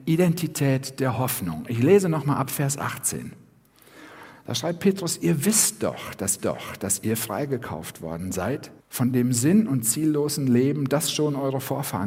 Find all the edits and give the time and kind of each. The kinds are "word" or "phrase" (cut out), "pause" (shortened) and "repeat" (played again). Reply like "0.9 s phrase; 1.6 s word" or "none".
6.4 s repeat; 8.8 s pause